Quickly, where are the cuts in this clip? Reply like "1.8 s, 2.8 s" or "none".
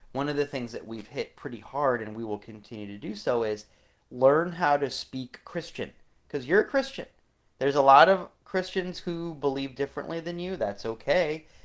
none